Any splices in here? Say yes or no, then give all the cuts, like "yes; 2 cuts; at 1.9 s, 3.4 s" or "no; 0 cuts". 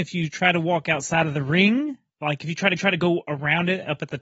yes; 2 cuts; at 2.1 s, 2.8 s